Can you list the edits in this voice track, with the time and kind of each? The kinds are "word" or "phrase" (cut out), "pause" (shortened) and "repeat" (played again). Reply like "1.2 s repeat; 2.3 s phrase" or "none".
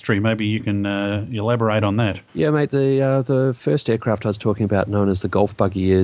none